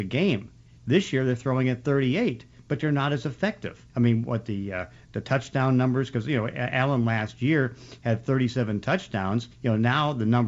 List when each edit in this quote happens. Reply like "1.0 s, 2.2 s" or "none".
3.9 s, 9.5 s